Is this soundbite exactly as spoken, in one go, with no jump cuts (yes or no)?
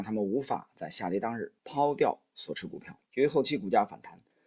no